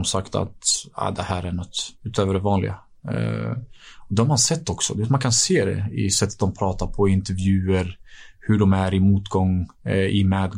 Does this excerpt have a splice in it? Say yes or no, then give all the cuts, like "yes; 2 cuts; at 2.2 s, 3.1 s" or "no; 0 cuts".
no; 0 cuts